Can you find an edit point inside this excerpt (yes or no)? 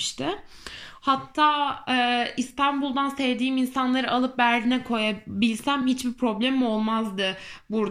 no